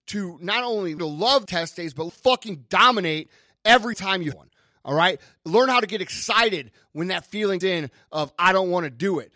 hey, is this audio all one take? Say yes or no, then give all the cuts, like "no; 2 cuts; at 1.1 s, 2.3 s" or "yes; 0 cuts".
no; 6 cuts; at 1.0 s, 1.5 s, 2.1 s, 3.9 s, 4.3 s, 7.6 s